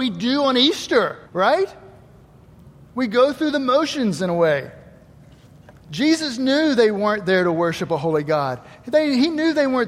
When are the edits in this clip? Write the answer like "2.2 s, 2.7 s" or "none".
1.3 s, 5.8 s